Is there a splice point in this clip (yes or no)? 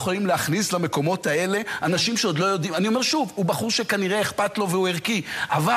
no